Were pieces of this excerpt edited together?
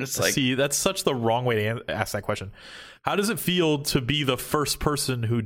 no; 0 cuts

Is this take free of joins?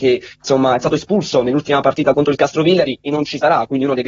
yes; 0 cuts

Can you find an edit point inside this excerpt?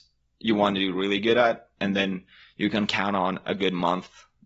no; 0 cuts

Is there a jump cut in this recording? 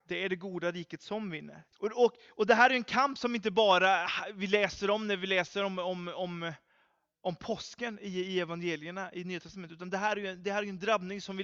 yes; 1 cut; at 1.7 s

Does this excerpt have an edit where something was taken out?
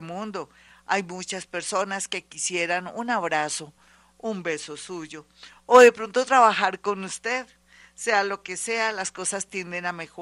no; 0 cuts

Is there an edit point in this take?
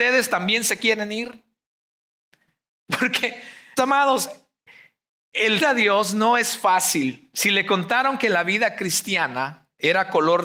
yes; 2 cuts; at 3.8 s, 5.6 s

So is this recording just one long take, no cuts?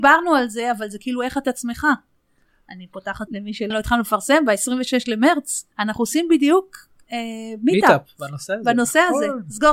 no; 4 cuts; at 1.4 s, 3.3 s, 3.7 s, 5.7 s

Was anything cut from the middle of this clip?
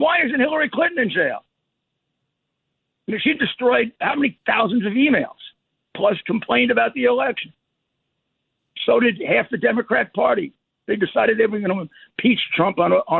yes; 1 cut; at 4.0 s

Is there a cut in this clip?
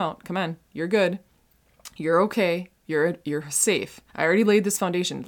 yes; 2 cuts; at 2.7 s, 4.1 s

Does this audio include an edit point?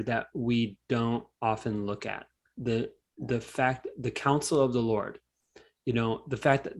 no; 0 cuts

